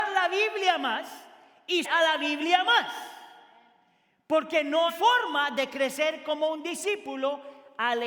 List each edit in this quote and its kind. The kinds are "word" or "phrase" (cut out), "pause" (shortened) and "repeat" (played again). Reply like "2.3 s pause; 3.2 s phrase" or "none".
1.8 s word; 4.9 s word